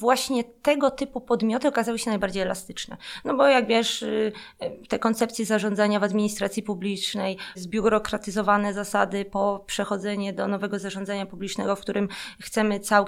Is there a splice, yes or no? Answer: yes